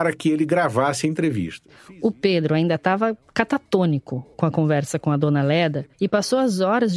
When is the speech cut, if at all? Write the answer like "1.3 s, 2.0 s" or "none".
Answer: 5.9 s